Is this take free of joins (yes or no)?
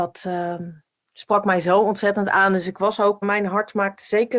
no